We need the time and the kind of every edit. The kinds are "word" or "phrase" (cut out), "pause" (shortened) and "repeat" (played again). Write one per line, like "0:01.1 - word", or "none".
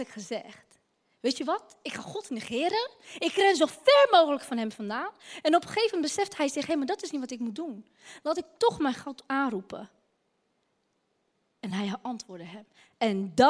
none